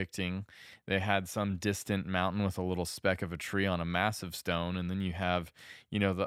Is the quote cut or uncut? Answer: uncut